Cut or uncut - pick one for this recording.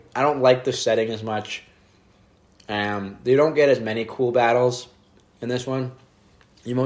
uncut